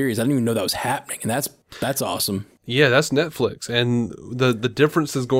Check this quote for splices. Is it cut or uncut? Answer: uncut